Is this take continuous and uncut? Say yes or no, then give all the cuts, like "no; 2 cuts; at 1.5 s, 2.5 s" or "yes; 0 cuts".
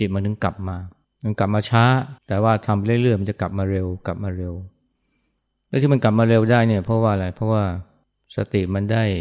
no; 3 cuts; at 1.0 s, 2.2 s, 8.0 s